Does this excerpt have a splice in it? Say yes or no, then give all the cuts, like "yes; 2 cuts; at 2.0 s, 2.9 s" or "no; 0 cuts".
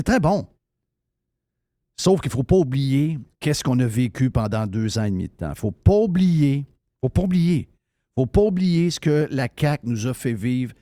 no; 0 cuts